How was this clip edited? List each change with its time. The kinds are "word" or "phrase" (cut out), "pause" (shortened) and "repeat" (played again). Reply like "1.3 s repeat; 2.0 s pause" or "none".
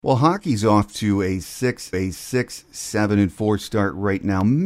1.9 s repeat